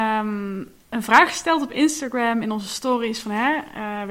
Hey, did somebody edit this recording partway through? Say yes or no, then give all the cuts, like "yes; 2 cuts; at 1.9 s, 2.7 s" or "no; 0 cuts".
no; 0 cuts